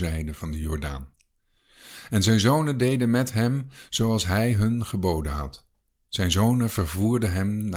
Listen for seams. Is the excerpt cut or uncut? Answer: uncut